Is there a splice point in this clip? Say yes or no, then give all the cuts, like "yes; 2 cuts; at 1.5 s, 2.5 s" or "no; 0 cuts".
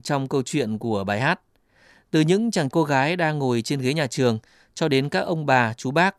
yes; 1 cut; at 2.7 s